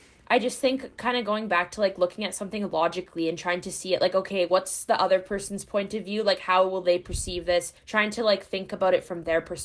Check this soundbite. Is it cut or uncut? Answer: cut